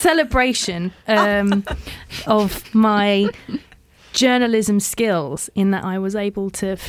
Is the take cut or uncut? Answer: uncut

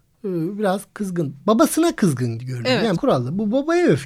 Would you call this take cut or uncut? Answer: cut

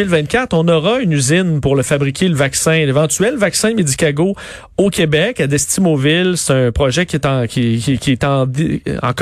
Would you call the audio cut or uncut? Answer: uncut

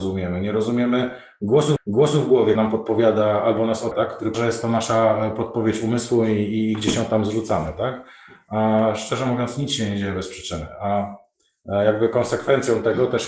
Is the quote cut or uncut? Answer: cut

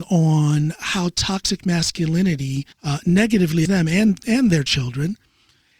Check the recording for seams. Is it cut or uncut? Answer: cut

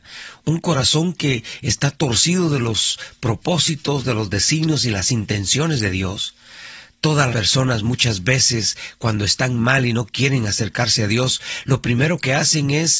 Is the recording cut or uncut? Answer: cut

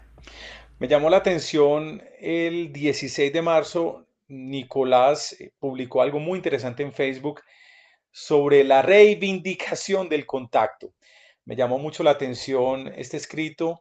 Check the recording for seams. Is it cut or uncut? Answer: uncut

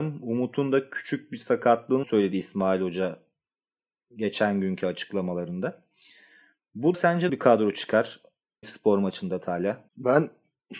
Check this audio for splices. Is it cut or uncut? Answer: cut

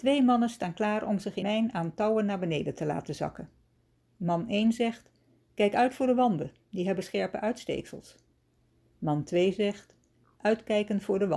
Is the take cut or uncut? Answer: cut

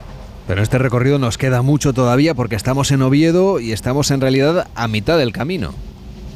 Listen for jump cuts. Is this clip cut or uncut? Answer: uncut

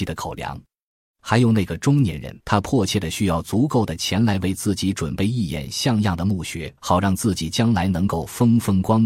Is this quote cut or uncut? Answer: cut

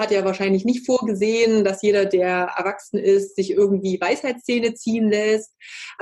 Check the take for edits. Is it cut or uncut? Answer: uncut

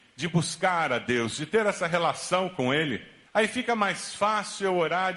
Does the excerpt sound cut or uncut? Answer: cut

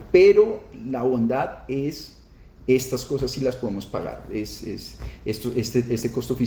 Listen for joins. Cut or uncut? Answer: uncut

